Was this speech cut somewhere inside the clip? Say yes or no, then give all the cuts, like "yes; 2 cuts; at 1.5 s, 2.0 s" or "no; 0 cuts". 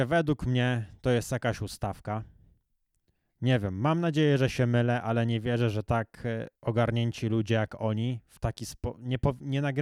yes; 1 cut; at 6.6 s